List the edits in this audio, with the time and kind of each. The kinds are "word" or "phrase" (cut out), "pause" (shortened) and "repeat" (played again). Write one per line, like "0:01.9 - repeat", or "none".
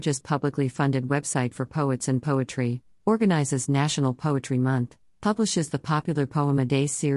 none